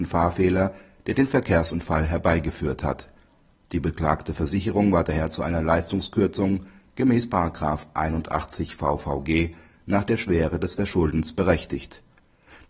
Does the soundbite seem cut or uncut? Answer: uncut